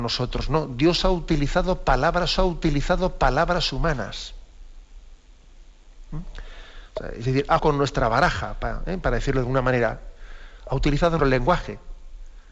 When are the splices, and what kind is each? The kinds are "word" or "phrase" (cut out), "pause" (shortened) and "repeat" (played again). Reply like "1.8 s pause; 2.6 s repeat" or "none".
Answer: 2.4 s repeat; 7.6 s word; 11.2 s word